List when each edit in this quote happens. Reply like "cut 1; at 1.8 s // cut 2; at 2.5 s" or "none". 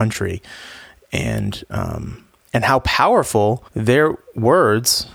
cut 1; at 3.7 s

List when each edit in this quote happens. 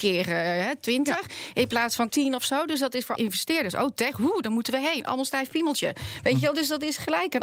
cut 1; at 2.1 s // cut 2; at 3.2 s

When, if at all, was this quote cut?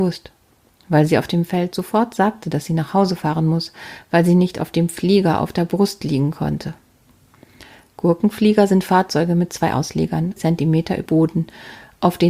cut 1; at 10.4 s // cut 2; at 11.1 s

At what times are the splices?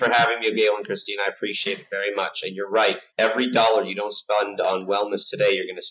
cut 1; at 3.1 s

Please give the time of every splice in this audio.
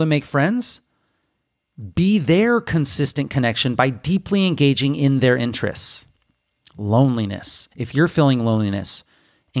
cut 1; at 7.7 s

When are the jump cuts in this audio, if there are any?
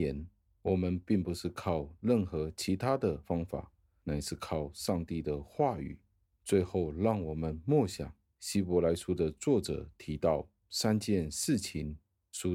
none

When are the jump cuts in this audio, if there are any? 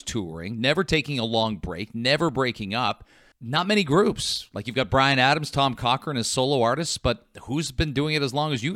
cut 1; at 3.3 s

